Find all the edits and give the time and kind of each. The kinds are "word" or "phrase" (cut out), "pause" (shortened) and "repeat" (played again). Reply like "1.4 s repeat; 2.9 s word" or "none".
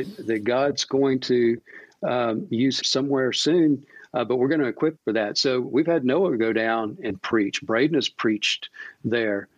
2.8 s word; 5.0 s word